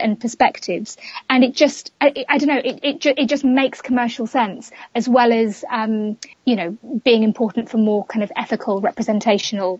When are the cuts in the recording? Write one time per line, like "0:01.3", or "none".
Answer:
0:02.0
0:06.3